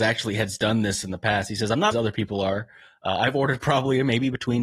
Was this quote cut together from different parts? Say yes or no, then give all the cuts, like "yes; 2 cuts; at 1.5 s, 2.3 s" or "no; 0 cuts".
yes; 1 cut; at 1.9 s